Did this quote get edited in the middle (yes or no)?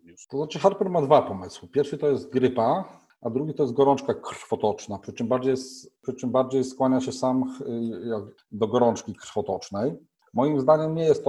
no